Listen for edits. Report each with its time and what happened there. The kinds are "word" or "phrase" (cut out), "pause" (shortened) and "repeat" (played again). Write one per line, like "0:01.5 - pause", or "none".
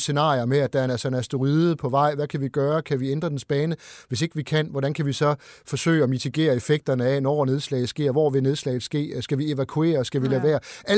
none